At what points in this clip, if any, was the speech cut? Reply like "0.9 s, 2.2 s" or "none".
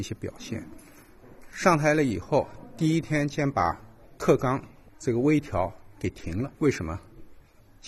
6.5 s